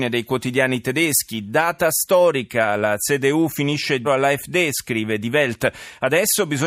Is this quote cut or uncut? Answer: cut